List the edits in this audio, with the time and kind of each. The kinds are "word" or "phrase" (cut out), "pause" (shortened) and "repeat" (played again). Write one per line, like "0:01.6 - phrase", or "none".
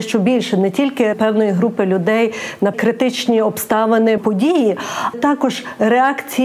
0:01.1 - word
0:02.7 - word
0:04.2 - phrase
0:05.1 - word